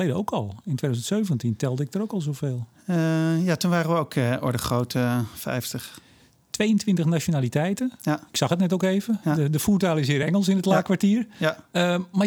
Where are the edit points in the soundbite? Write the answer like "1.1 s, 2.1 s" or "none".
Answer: none